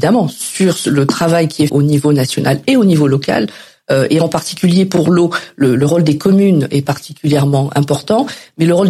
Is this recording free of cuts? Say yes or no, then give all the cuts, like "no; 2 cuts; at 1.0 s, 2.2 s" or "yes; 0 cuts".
no; 1 cut; at 1.7 s